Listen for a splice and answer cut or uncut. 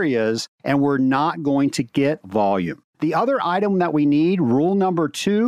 cut